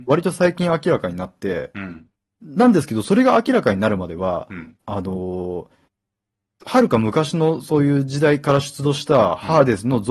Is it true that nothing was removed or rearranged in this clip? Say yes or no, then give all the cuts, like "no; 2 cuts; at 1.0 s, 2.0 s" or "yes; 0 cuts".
no; 1 cut; at 2.2 s